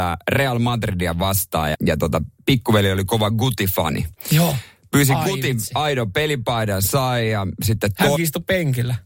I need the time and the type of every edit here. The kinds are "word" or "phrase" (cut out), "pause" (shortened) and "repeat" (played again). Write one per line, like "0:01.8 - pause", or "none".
0:01.7 - word
0:08.2 - word